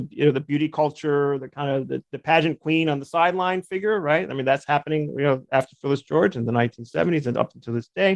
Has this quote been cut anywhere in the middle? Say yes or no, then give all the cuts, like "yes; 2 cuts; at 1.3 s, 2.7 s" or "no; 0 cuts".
no; 0 cuts